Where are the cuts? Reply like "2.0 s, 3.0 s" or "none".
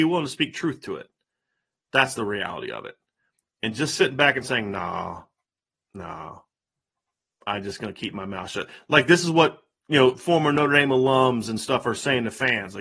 none